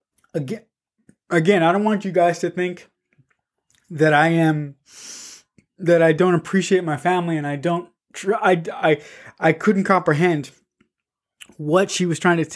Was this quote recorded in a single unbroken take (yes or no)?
yes